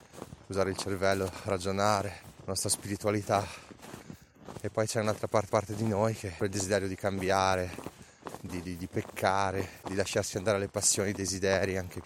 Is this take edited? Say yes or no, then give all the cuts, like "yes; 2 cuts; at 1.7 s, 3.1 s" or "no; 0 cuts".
yes; 5 cuts; at 2.4 s, 5.5 s, 6.4 s, 8.5 s, 9.8 s